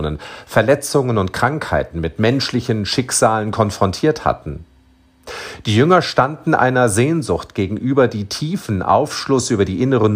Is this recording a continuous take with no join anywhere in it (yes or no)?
yes